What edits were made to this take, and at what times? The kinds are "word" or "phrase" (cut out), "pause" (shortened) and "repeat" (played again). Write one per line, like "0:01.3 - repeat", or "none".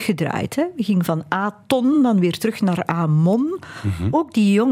none